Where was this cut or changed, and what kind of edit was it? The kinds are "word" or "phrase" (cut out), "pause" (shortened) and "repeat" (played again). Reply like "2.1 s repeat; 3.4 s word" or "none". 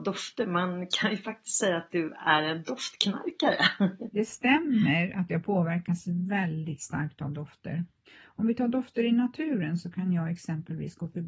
none

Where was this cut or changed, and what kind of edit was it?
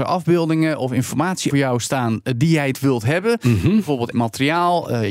1.5 s word; 2.7 s phrase; 4.1 s word

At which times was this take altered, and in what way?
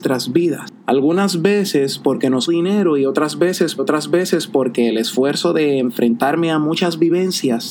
2.5 s phrase; 3.8 s repeat

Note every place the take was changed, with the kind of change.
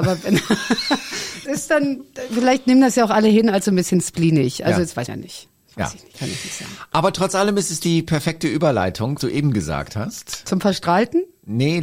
1.4 s word; 5.1 s word; 9.2 s word

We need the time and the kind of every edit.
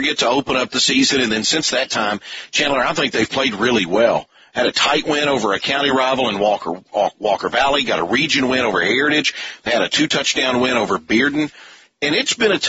none

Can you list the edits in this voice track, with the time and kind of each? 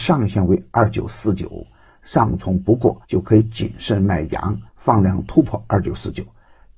3.0 s pause; 4.7 s pause

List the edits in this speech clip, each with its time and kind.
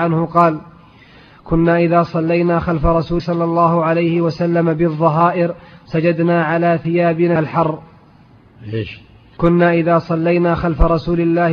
3.2 s word; 7.4 s word; 9.4 s word

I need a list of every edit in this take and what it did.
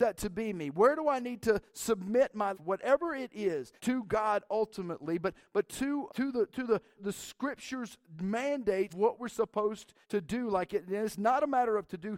2.5 s word; 3.8 s word; 6.1 s word; 6.9 s word; 8.9 s word; 10.0 s pause

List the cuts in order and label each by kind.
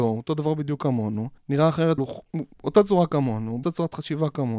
1.4 s pause; 2.0 s word; 2.5 s pause; 3.6 s phrase

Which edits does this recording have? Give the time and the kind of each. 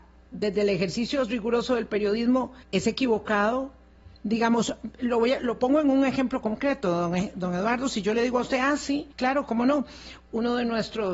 2.6 s pause; 4.1 s pause; 9.1 s pause

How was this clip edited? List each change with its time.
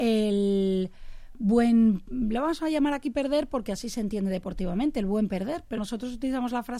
5.8 s word

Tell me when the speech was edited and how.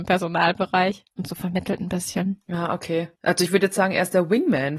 1.1 s pause; 3.2 s pause

